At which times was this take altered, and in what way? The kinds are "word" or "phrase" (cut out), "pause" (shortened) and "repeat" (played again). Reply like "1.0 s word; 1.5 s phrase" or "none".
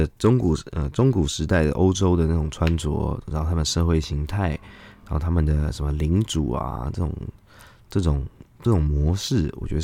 none